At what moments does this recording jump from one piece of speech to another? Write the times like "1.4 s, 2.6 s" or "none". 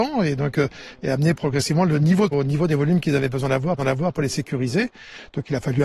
2.3 s, 3.8 s